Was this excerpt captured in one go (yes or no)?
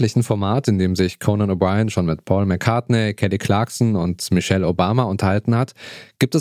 yes